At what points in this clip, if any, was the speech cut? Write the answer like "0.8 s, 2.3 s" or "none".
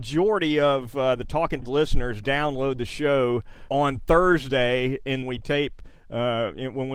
1.6 s, 3.7 s, 5.2 s